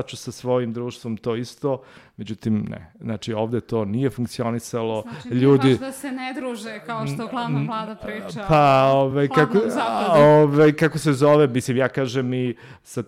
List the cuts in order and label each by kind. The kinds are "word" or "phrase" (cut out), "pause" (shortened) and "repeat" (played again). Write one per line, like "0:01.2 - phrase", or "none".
none